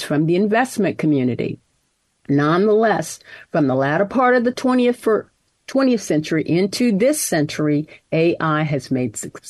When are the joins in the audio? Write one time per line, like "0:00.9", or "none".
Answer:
none